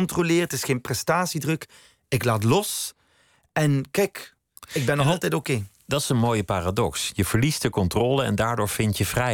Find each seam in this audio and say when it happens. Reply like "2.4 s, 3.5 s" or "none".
none